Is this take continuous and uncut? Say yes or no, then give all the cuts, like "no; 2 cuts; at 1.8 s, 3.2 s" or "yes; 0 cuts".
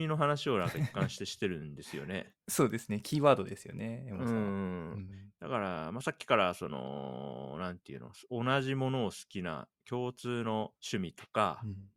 no; 1 cut; at 10.8 s